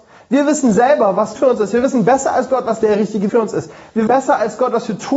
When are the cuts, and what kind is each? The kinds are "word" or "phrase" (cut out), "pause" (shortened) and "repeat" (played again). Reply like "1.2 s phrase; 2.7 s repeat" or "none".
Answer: 1.4 s word; 3.3 s word; 4.1 s word